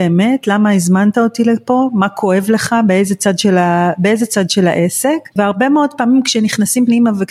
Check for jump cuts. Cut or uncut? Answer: uncut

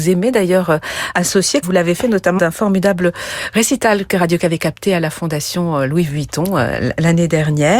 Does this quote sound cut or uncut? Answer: cut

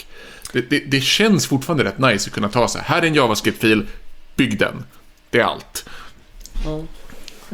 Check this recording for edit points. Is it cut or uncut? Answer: uncut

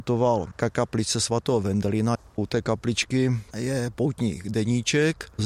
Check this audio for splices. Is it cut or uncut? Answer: uncut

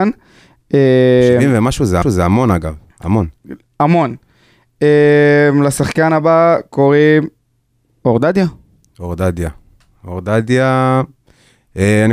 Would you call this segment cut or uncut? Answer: cut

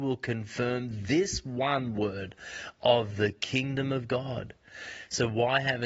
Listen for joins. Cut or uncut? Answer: uncut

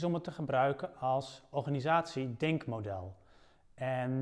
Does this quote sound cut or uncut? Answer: uncut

